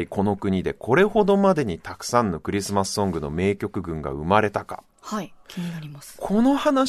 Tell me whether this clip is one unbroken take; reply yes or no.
no